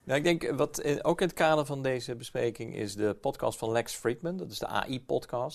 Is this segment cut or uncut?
uncut